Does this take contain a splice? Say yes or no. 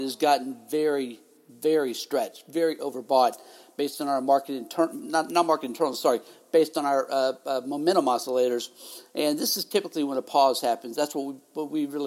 no